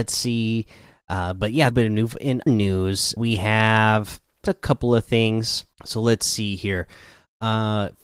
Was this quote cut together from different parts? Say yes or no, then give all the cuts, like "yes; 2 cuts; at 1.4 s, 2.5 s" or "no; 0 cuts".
yes; 5 cuts; at 1.7 s, 2.5 s, 3.2 s, 4.5 s, 5.7 s